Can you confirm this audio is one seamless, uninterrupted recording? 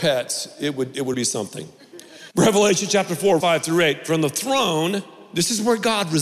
no; 3 cuts; at 1.1 s, 2.3 s, 3.4 s

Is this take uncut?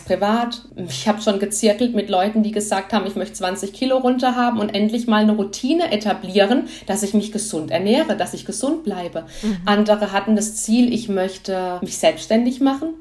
yes; 0 cuts

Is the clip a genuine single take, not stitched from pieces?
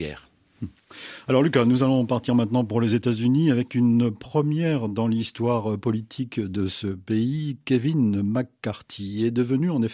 yes; 0 cuts

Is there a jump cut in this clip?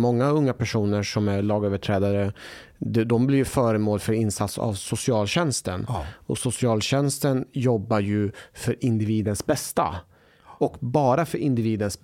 no; 0 cuts

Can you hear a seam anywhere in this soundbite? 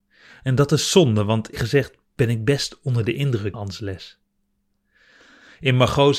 yes; 2 cuts; at 1.5 s, 3.5 s

